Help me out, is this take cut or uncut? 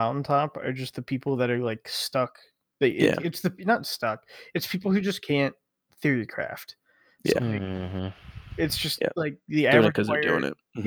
uncut